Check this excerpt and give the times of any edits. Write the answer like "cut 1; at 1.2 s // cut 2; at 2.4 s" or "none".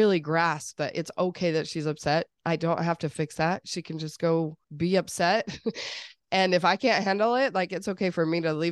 cut 1; at 4.6 s

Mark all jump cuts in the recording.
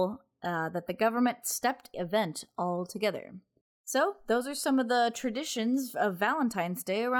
cut 1; at 1.9 s // cut 2; at 3.6 s

